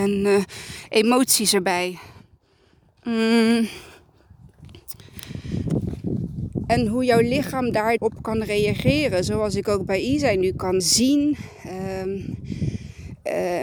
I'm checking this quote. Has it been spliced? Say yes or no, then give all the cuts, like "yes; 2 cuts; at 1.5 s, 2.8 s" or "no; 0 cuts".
yes; 2 cuts; at 8.0 s, 10.8 s